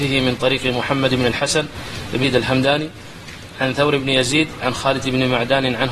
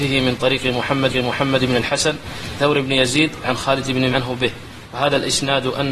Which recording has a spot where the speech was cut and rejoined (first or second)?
second